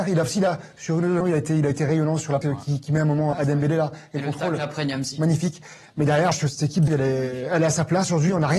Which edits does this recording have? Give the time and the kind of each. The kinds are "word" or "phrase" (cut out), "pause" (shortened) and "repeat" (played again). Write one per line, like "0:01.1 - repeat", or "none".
0:01.2 - word
0:02.4 - word
0:03.3 - word
0:06.3 - word
0:06.9 - word